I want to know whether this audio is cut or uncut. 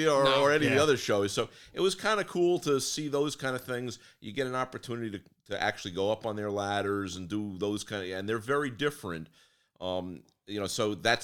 uncut